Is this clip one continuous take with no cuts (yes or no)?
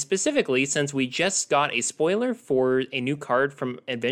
yes